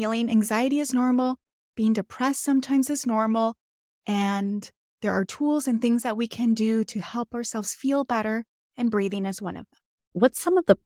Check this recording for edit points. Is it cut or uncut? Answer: uncut